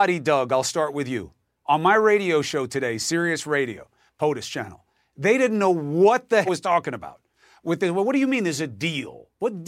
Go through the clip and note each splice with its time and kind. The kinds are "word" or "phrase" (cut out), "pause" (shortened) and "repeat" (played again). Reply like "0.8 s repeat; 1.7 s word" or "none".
6.5 s phrase